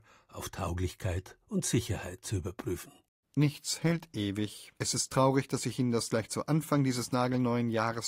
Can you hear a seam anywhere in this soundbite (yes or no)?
yes